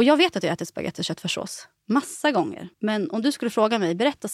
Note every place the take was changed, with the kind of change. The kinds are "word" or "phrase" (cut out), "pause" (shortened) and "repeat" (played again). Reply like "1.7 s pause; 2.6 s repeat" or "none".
2.7 s pause